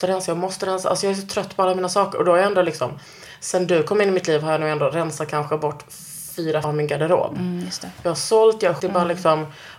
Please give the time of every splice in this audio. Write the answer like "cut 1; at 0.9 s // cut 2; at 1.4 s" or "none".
cut 1; at 6.6 s // cut 2; at 8.8 s